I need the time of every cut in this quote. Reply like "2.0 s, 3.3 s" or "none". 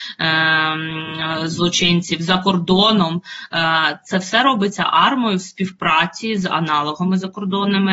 none